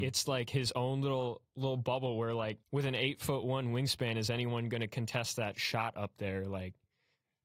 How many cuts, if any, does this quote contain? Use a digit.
1